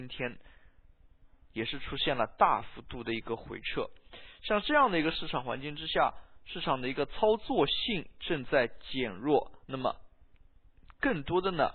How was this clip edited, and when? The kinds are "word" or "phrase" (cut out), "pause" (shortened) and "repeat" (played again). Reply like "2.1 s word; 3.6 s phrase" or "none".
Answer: 9.6 s pause